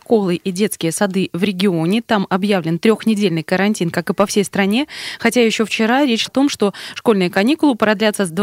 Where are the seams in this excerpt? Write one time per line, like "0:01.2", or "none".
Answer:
0:06.3